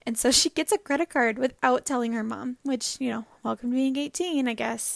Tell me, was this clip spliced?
no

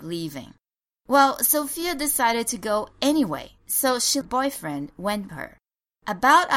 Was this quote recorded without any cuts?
no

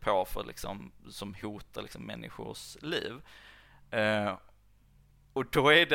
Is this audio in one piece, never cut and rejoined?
yes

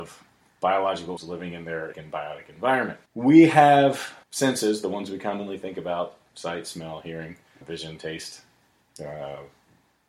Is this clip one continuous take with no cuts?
no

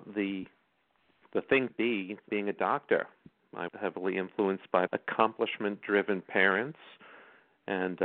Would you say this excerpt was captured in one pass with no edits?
no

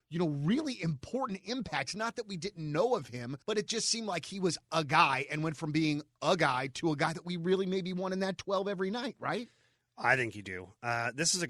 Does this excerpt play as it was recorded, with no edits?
no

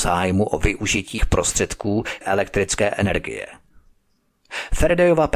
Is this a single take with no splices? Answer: no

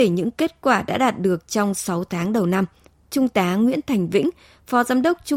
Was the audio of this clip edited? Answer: no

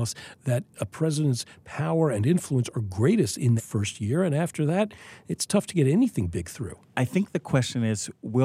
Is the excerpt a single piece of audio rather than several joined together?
no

